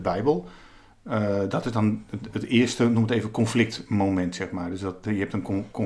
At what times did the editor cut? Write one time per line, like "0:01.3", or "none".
none